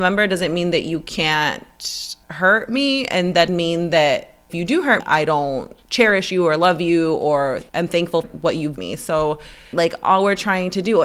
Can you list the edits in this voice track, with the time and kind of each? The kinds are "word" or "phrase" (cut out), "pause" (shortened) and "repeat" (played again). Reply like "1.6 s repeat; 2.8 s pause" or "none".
2.2 s pause; 3.5 s word; 4.5 s word; 5.0 s word; 5.8 s pause; 7.7 s pause; 8.2 s word; 8.8 s word; 9.7 s word